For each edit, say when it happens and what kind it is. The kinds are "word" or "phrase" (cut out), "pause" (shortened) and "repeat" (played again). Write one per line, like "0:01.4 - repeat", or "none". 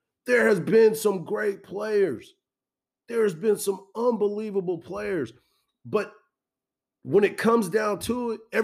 none